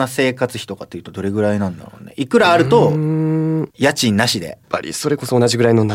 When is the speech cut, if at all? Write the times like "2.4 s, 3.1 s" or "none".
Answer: 3.7 s, 4.6 s